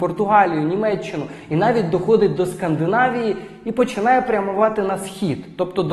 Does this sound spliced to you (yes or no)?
no